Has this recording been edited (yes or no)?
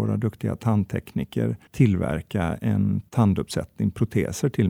yes